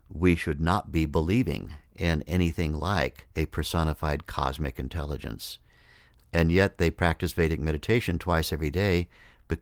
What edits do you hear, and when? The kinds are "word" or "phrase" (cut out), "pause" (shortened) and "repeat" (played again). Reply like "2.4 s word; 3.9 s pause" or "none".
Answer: 3.3 s pause